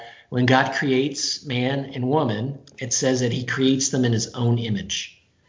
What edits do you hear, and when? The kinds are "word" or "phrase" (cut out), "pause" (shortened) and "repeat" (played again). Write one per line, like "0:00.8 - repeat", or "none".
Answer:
none